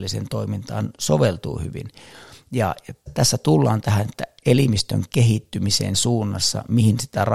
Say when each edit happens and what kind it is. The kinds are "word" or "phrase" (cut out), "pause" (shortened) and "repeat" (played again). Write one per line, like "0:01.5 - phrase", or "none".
0:03.1 - word
0:05.9 - word

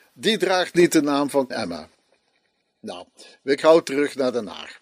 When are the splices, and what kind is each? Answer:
0:01.5 - word
0:03.6 - word

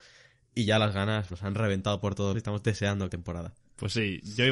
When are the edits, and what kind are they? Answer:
0:01.3 - word
0:02.3 - word
0:03.1 - phrase

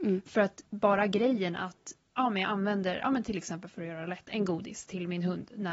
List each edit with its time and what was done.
none

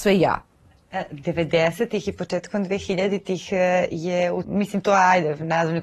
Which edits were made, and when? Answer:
0:04.4 - word

